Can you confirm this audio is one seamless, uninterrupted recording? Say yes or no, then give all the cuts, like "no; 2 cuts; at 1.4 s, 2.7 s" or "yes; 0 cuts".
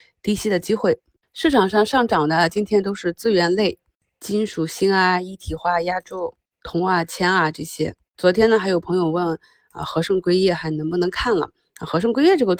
yes; 0 cuts